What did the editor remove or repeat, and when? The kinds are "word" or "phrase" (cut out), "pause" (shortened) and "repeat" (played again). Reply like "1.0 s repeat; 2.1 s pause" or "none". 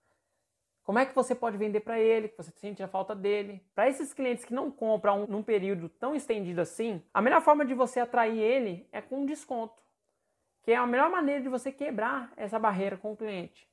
3.7 s pause; 5.2 s word; 7.1 s pause

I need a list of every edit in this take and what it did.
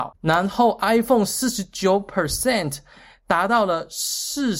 none

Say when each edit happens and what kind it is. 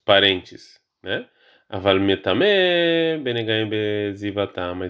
none

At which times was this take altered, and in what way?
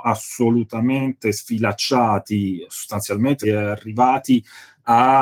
3.4 s word

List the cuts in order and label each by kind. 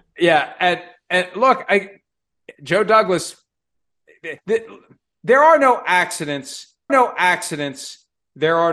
2.5 s pause; 4.4 s pause; 6.9 s repeat

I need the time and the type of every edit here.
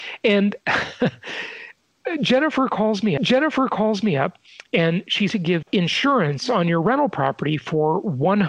3.2 s repeat; 5.3 s phrase; 5.6 s word

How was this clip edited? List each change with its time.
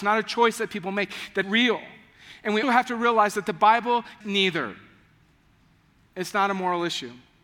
1.4 s word; 2.6 s word; 4.2 s word

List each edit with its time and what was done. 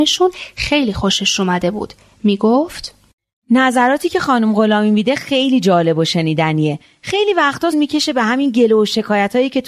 7.7 s word

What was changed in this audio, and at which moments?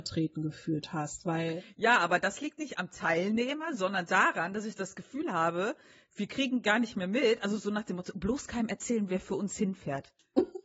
none

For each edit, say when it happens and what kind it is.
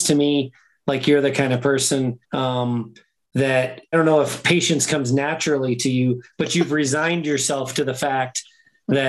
2.2 s pause; 3.9 s word

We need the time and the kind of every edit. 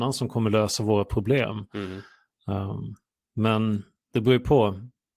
none

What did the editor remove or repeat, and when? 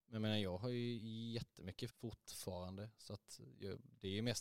1.9 s word

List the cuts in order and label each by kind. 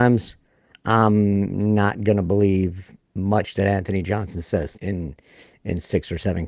4.8 s phrase

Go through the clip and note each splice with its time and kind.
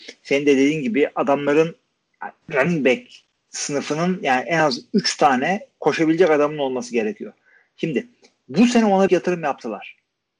2.4 s pause; 9.1 s word

